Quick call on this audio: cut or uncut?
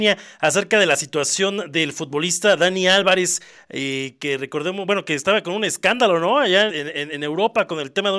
cut